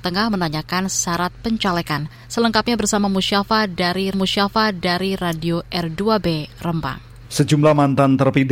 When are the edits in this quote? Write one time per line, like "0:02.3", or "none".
0:04.1
0:07.2